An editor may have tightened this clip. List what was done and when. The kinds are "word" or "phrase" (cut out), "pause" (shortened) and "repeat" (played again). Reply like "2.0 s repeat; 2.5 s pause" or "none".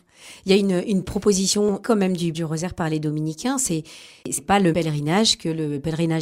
1.8 s word; 2.3 s word; 4.2 s word; 4.7 s word